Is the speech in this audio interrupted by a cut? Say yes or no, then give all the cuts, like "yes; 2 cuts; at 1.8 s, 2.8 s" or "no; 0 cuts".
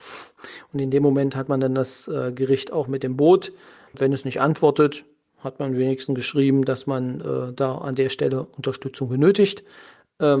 no; 0 cuts